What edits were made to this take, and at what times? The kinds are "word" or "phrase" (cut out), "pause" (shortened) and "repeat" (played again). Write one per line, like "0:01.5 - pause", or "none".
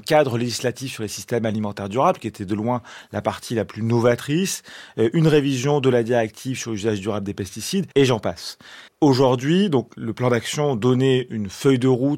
0:07.9 - pause
0:08.9 - pause
0:10.0 - word